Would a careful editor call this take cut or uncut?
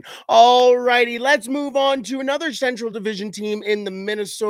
uncut